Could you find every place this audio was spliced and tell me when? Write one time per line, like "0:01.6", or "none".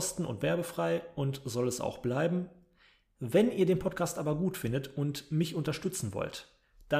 none